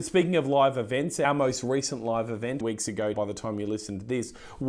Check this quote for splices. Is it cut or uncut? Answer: cut